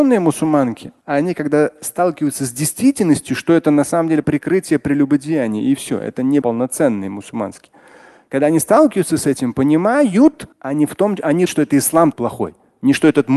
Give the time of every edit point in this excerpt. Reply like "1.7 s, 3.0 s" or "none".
1.0 s, 4.2 s, 6.4 s, 10.5 s, 11.5 s, 12.1 s